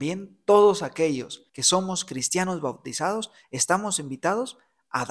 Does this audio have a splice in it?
yes; 1 cut; at 1.5 s

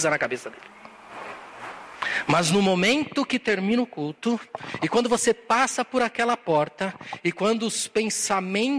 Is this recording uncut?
yes; 0 cuts

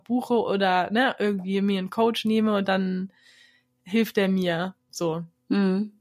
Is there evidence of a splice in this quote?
no; 0 cuts

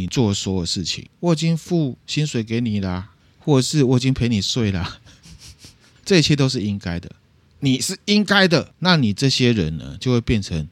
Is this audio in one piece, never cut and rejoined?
yes; 0 cuts

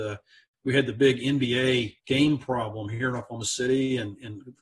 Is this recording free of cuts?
no; 1 cut; at 2.0 s

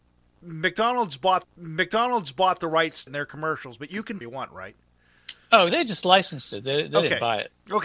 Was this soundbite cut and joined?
yes; 4 cuts; at 1.4 s, 3.1 s, 4.2 s, 5.7 s

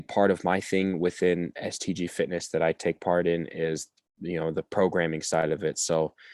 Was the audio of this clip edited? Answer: no; 0 cuts

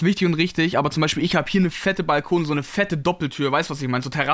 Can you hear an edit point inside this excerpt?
no; 0 cuts

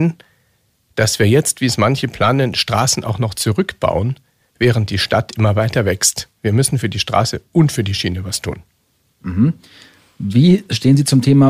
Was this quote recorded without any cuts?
yes; 0 cuts

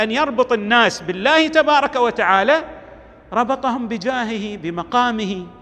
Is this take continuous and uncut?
yes; 0 cuts

